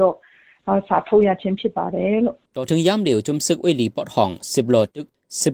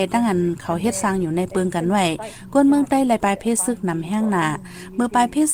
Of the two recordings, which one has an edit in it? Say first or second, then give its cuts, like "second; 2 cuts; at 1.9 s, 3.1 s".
first; 1 cut; at 2.5 s